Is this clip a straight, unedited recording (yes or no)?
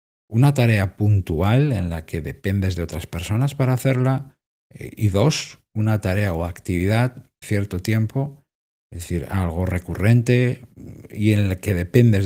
no